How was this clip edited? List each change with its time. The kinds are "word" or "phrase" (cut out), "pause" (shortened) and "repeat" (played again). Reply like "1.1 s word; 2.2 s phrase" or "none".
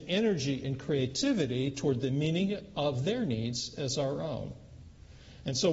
none